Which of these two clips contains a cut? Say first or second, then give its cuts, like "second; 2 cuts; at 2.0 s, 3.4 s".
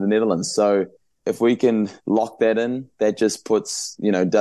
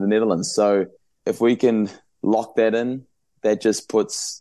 first; 2 cuts; at 2.0 s, 2.9 s